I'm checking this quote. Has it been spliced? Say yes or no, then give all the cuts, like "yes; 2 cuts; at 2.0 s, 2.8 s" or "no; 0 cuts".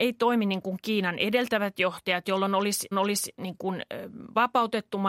yes; 1 cut; at 2.9 s